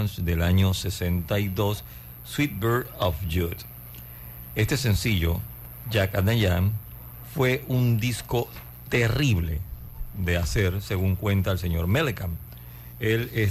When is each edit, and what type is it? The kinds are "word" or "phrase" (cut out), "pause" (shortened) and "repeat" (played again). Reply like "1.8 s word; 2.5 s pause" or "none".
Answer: none